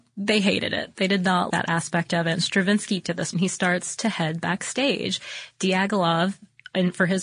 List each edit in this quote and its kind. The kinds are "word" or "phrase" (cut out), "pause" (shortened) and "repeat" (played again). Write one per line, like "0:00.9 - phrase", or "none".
0:01.5 - word
0:03.0 - word
0:03.3 - word

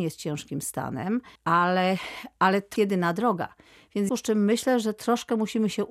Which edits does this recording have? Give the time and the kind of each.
0:01.4 - pause
0:02.8 - word
0:04.1 - phrase

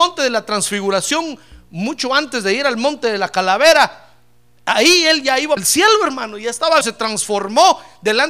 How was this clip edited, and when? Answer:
0:05.6 - word
0:06.8 - word

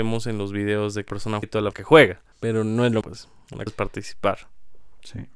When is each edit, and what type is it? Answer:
0:01.1 - word
0:01.4 - word
0:01.7 - phrase
0:02.3 - pause
0:03.0 - word
0:03.7 - word

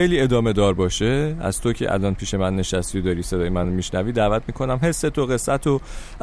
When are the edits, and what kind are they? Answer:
none

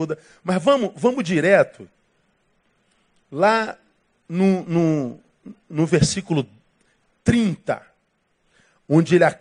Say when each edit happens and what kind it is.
none

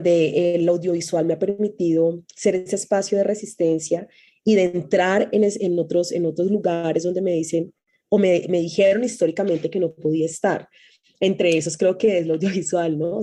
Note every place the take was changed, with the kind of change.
none

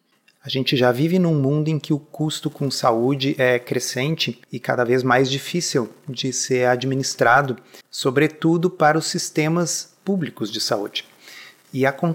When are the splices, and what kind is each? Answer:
0:04.4 - pause
0:07.8 - pause

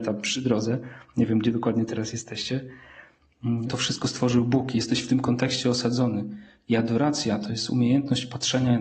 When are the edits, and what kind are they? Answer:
0:03.7 - word

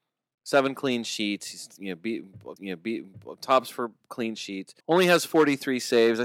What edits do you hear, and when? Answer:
0:02.6 - repeat
0:04.8 - pause

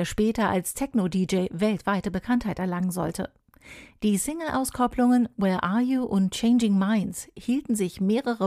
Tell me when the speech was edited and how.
none

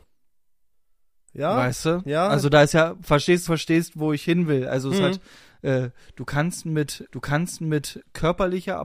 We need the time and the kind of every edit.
0:03.5 - phrase
0:07.1 - repeat

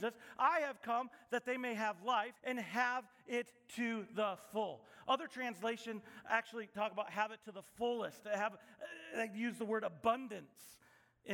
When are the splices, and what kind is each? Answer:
0:02.4 - pause

